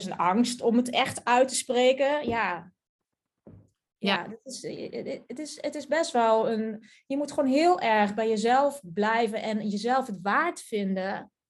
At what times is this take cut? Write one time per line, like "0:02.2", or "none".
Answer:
none